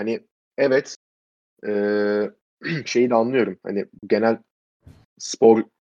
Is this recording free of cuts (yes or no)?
yes